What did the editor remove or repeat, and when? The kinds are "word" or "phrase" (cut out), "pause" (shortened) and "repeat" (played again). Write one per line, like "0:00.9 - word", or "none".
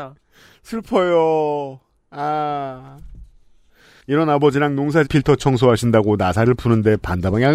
0:05.1 - phrase